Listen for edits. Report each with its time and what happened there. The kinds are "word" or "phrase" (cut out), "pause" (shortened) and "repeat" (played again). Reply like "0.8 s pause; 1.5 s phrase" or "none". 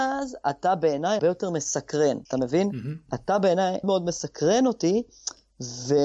1.2 s word; 2.3 s pause; 3.8 s word